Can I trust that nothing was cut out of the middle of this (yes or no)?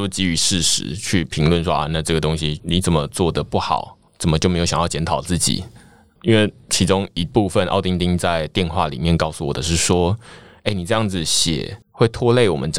yes